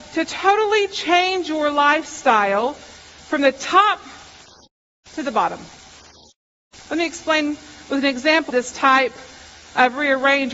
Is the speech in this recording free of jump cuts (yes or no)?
no